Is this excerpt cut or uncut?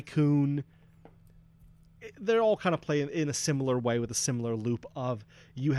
uncut